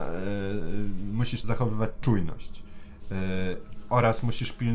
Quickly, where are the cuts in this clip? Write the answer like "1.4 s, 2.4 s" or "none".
1.4 s